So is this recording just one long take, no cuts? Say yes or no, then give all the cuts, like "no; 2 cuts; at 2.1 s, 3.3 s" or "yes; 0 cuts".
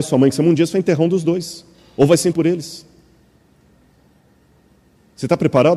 no; 1 cut; at 2.3 s